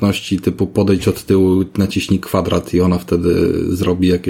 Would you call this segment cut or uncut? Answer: uncut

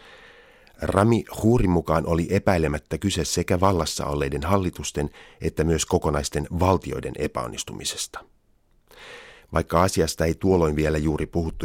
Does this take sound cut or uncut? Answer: uncut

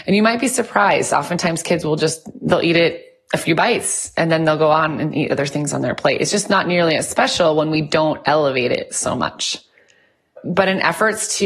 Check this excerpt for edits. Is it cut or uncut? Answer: uncut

